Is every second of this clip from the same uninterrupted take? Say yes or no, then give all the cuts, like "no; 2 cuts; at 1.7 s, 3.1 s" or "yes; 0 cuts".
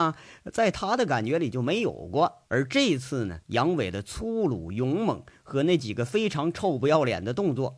no; 2 cuts; at 2.5 s, 3.4 s